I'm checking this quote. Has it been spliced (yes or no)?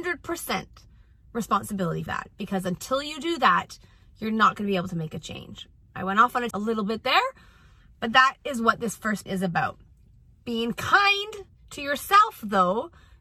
yes